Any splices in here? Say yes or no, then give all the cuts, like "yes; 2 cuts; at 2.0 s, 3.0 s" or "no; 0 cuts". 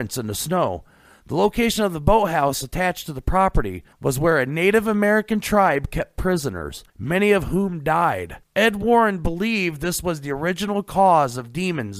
yes; 3 cuts; at 3.9 s, 6.9 s, 8.4 s